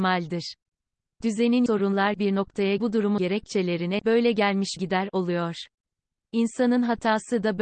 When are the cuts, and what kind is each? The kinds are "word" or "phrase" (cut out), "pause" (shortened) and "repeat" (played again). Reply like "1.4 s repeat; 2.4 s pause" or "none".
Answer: 1.7 s word; 2.1 s word; 2.8 s word; 3.2 s word; 4.0 s word; 4.8 s word